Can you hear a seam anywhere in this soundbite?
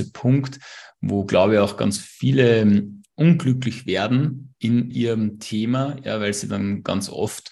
yes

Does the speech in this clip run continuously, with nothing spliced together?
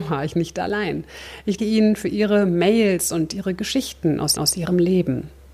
no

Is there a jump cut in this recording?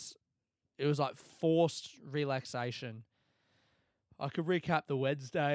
no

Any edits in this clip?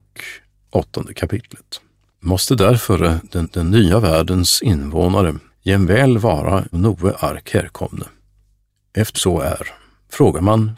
yes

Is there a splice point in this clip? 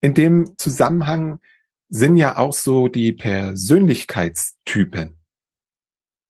no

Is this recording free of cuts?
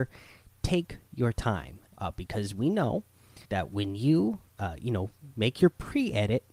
no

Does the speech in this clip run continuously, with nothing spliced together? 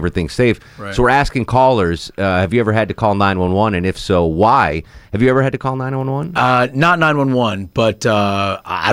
yes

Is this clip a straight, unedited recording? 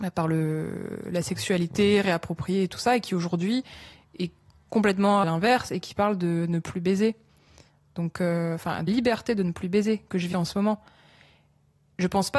no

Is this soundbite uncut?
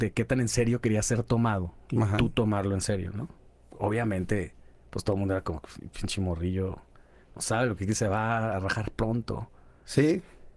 yes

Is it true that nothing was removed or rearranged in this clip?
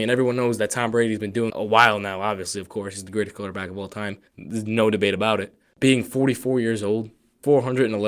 no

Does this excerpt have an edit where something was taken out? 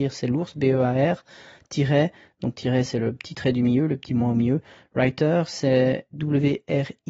no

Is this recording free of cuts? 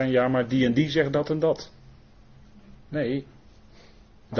no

